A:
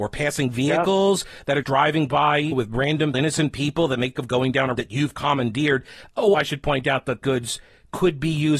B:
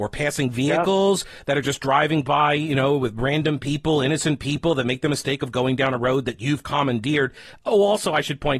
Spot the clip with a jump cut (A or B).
A